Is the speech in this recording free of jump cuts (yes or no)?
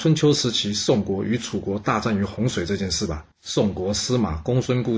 no